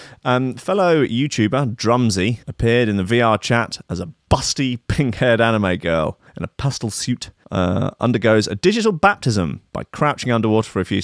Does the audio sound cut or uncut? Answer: cut